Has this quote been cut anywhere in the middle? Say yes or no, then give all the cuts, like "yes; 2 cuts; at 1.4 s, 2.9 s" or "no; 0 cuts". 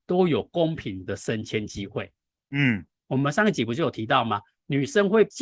no; 0 cuts